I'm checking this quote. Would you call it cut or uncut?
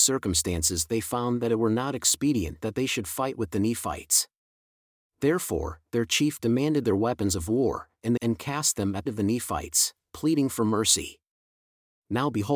cut